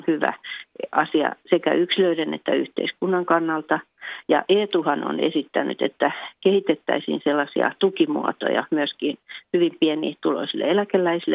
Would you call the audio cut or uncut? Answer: uncut